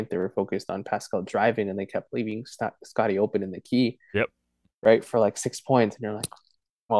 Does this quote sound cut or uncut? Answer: uncut